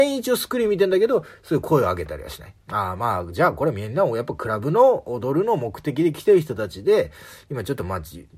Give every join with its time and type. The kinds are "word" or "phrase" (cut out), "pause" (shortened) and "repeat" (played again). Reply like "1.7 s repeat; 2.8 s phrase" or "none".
2.6 s pause